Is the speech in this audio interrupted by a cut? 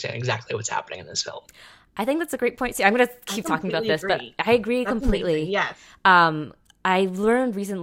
no; 0 cuts

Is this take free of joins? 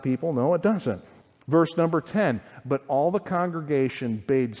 no; 1 cut; at 1.2 s

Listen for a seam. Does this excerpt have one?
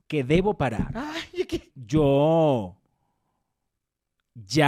yes; 1 cut; at 1.7 s

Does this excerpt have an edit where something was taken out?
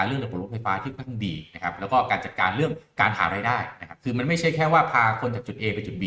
no; 0 cuts

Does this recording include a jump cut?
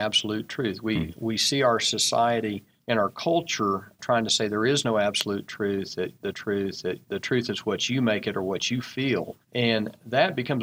yes; 4 cuts; at 2.8 s, 4.0 s, 6.3 s, 9.4 s

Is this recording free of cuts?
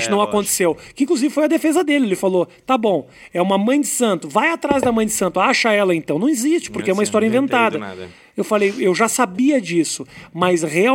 yes; 0 cuts

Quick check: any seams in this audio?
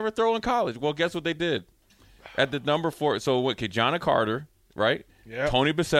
no; 0 cuts

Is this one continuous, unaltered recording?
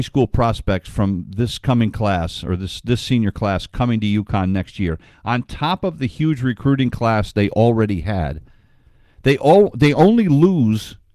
yes; 0 cuts

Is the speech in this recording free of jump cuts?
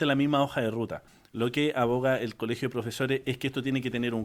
yes; 0 cuts

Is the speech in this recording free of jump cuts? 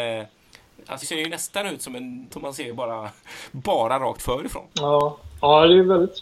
no; 3 cuts; at 1.0 s, 2.3 s, 4.7 s

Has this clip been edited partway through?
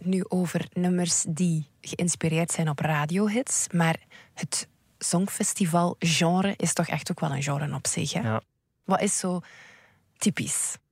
no; 0 cuts

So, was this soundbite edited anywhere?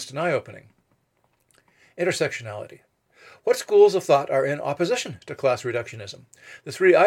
no; 0 cuts

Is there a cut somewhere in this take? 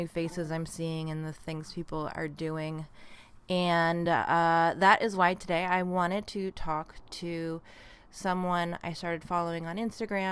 no; 0 cuts

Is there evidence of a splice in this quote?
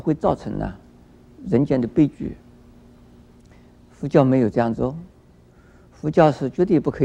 no; 0 cuts

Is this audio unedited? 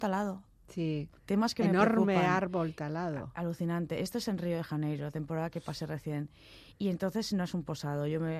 no; 1 cut; at 1.2 s

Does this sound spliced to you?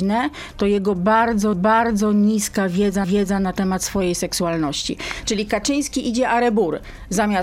yes; 2 cuts; at 1.5 s, 3.0 s

